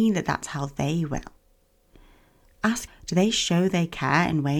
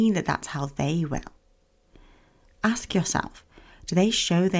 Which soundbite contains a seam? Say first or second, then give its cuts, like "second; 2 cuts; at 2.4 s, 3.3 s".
first; 1 cut; at 2.9 s